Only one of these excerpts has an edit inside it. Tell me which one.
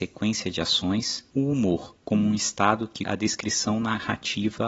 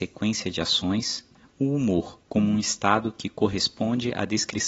first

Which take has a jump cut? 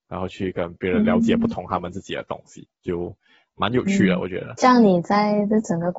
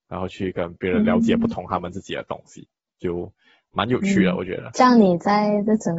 first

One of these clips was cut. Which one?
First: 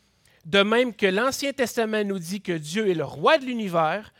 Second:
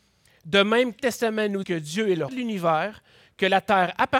second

